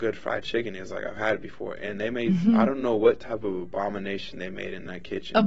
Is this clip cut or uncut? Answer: uncut